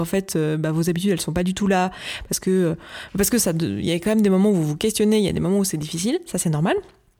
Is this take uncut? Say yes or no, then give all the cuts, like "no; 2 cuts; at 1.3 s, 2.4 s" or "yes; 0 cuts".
yes; 0 cuts